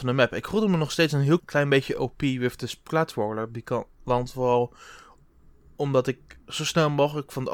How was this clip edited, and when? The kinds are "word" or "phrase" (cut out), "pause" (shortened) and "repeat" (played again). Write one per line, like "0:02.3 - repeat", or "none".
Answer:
0:01.4 - word